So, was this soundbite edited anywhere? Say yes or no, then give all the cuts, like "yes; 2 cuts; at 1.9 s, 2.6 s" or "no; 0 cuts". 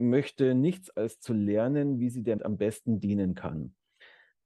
yes; 2 cuts; at 0.9 s, 2.4 s